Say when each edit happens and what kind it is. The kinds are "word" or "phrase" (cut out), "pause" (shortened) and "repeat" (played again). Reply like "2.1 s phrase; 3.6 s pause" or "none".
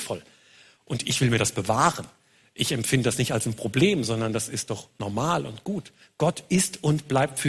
none

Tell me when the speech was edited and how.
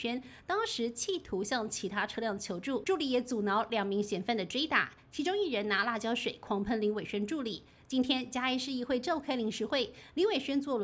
2.8 s word

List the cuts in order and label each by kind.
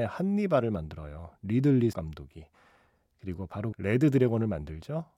1.9 s word; 3.7 s phrase

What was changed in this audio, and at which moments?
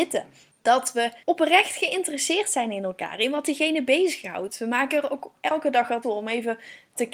1.2 s pause; 6.0 s word

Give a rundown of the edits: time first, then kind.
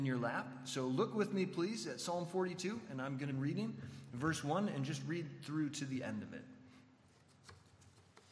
3.3 s word

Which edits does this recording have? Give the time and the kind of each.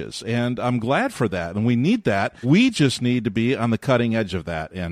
2.4 s word

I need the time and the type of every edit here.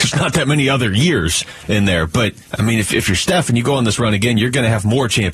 2.5 s pause

